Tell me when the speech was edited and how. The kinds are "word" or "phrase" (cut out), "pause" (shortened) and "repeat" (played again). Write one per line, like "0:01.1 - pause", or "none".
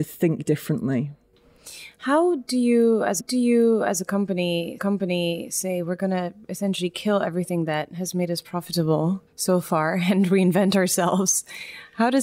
0:03.2 - repeat
0:04.8 - repeat
0:09.3 - pause